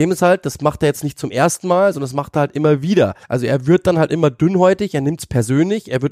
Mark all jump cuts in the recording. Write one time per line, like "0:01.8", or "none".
0:03.2